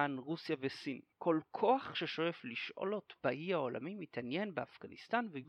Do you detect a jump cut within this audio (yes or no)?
yes